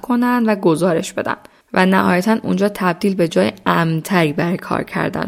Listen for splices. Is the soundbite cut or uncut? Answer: uncut